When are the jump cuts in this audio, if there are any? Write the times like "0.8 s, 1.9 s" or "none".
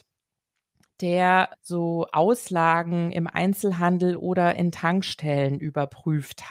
none